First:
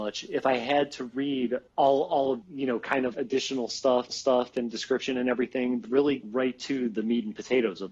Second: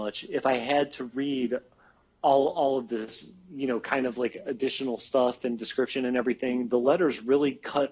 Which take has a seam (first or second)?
first